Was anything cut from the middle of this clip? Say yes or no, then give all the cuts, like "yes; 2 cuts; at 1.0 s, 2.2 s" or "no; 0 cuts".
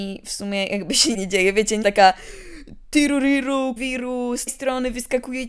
yes; 4 cuts; at 1.1 s, 1.8 s, 3.8 s, 4.5 s